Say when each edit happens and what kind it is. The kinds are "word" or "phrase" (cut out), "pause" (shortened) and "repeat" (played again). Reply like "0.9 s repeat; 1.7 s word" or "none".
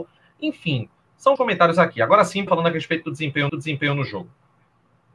1.4 s word; 2.5 s word; 3.5 s repeat